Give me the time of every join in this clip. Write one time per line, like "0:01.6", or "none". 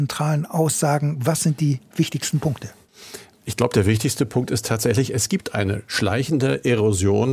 none